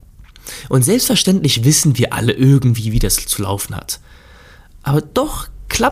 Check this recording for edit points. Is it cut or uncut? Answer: uncut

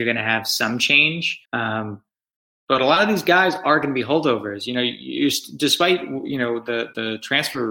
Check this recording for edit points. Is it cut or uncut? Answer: cut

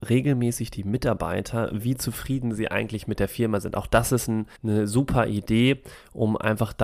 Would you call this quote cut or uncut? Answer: cut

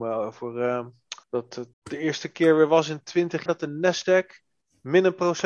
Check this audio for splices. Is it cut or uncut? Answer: cut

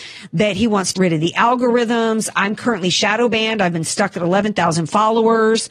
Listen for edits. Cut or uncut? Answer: cut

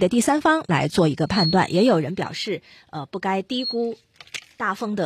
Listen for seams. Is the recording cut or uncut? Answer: uncut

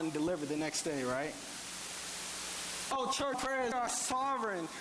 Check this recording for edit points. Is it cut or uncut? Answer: cut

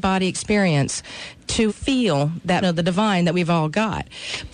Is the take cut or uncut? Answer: cut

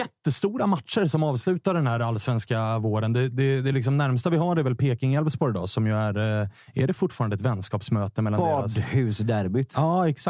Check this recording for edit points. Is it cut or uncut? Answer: uncut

